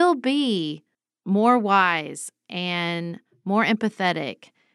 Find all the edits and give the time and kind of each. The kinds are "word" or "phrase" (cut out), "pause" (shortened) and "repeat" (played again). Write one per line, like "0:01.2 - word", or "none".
0:00.9 - pause